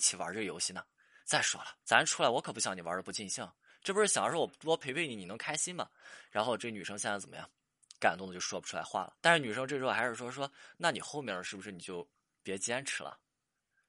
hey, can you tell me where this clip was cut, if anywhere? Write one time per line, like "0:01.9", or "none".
0:01.8
0:09.2